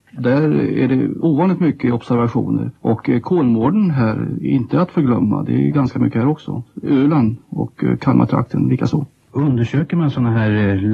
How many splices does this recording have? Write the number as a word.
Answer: one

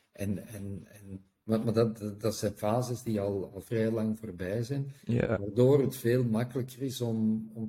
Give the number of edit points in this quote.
one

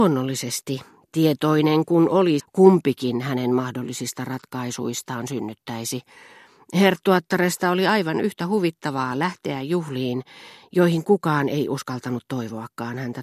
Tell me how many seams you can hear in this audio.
one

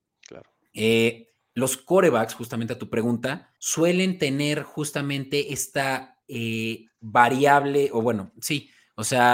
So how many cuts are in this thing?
two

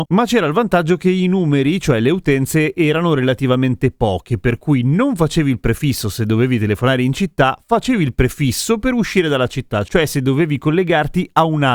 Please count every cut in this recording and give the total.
zero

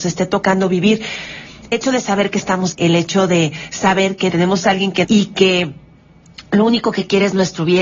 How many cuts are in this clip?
four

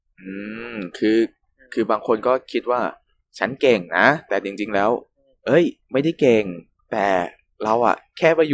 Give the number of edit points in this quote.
zero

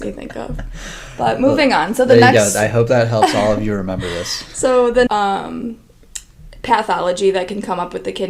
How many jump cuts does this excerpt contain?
one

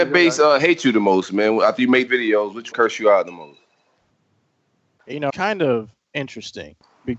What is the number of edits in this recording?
three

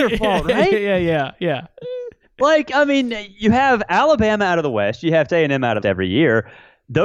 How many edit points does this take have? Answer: two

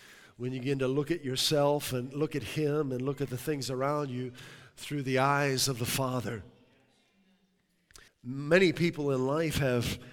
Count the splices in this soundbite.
one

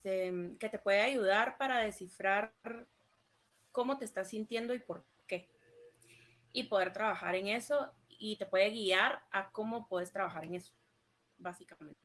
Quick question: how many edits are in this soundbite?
zero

